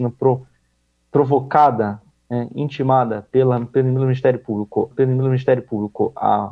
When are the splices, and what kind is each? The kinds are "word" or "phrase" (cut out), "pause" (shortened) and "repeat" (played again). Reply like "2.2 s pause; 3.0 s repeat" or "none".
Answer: 4.9 s repeat